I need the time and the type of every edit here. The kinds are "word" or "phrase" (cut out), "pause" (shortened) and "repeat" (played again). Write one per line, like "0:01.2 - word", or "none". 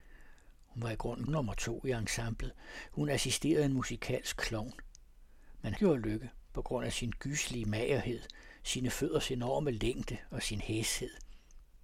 0:01.3 - word
0:05.7 - word